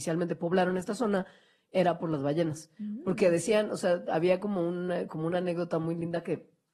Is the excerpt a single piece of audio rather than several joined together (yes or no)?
yes